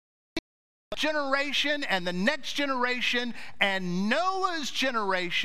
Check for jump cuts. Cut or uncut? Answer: uncut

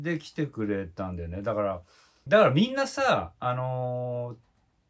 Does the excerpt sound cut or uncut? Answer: cut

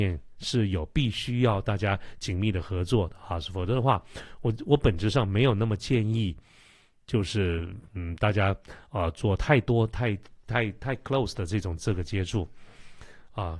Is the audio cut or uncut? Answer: uncut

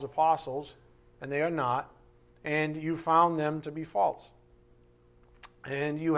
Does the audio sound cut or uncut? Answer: uncut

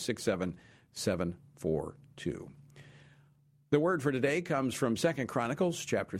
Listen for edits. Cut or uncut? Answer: uncut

